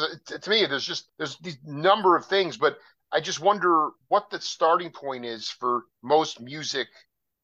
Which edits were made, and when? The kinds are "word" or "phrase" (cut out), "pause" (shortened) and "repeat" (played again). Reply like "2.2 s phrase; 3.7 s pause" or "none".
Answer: 1.1 s pause; 4.0 s pause; 5.9 s pause